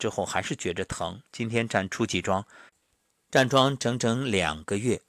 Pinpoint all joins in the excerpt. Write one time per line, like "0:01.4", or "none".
0:01.3